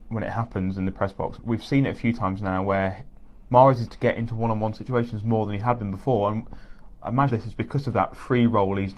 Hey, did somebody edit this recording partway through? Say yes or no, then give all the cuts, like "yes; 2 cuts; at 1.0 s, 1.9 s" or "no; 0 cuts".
yes; 3 cuts; at 1.4 s, 3.9 s, 7.3 s